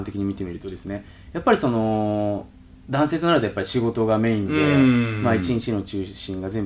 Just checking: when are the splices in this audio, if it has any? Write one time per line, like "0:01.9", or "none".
none